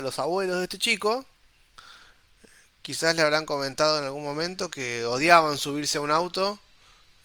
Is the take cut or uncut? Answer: uncut